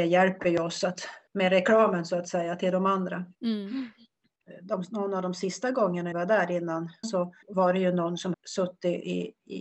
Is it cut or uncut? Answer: cut